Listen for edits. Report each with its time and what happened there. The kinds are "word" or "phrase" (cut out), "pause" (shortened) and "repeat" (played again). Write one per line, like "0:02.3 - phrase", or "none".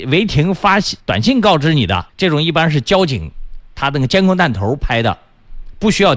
0:01.0 - pause
0:02.1 - pause